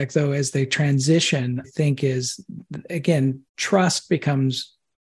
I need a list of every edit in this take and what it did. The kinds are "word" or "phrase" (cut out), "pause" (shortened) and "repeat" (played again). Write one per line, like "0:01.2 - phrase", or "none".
0:01.6 - word
0:03.5 - pause

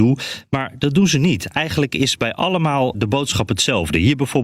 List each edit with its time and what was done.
0:02.9 - word

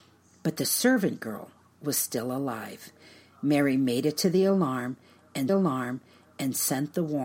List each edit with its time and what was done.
0:05.5 - repeat

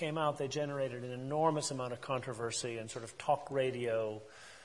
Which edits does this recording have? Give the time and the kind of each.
none

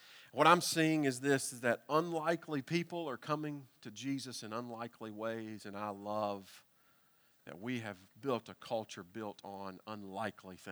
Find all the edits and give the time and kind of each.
none

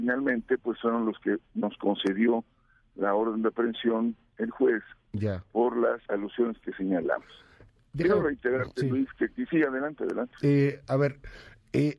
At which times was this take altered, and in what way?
0:06.1 - word

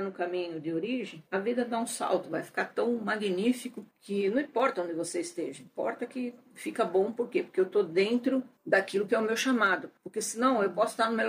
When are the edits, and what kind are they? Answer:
0:01.3 - pause
0:03.9 - pause
0:08.6 - pause
0:10.0 - pause

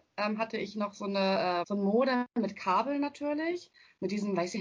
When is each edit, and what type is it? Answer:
0:01.6 - word

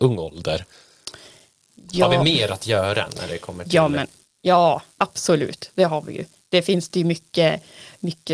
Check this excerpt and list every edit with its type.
none

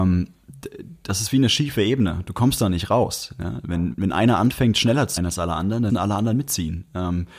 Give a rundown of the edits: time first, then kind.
0:03.9 - word
0:05.2 - word
0:05.9 - word

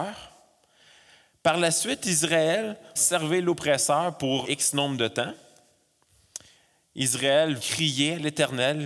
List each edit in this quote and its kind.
0:03.0 - word
0:04.4 - word
0:07.6 - word

